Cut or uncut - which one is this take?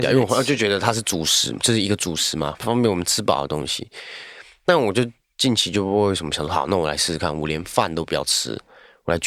uncut